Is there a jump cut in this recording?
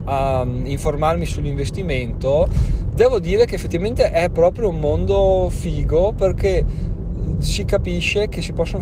no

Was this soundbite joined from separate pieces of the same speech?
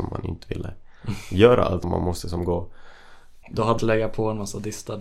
yes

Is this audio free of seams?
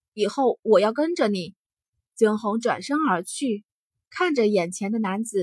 yes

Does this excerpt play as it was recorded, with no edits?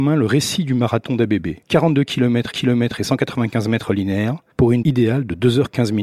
no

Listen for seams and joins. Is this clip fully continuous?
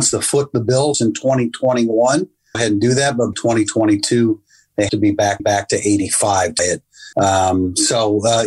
no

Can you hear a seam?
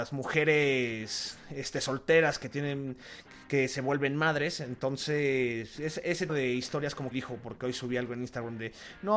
yes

